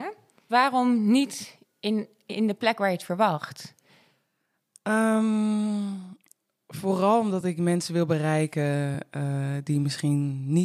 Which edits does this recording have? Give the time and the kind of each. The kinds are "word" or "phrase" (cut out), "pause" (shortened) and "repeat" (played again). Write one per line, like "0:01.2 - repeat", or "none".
none